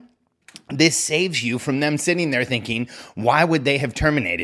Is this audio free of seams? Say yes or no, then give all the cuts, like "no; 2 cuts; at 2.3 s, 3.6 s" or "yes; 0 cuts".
yes; 0 cuts